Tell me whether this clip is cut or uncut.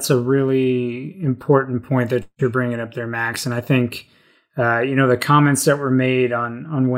uncut